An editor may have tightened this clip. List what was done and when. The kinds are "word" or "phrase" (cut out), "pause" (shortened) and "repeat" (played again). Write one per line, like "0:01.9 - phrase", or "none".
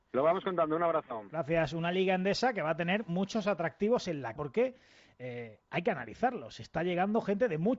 0:04.4 - phrase